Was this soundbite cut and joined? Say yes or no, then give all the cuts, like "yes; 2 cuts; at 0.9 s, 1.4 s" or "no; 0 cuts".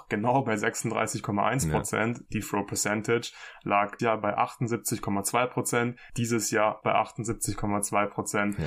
yes; 3 cuts; at 2.4 s, 4.0 s, 6.8 s